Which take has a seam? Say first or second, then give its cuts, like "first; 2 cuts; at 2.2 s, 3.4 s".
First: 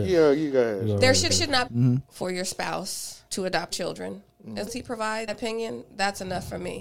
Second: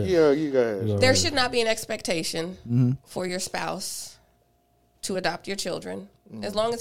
first; 6 cuts; at 1.3 s, 1.7 s, 3.3 s, 3.7 s, 4.7 s, 5.3 s